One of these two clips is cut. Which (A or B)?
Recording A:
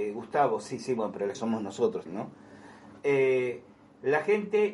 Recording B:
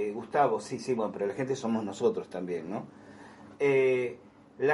A